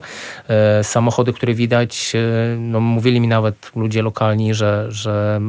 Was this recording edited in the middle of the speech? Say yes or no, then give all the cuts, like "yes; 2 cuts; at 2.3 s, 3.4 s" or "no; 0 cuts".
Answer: no; 0 cuts